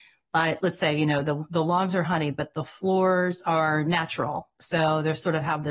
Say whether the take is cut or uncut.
uncut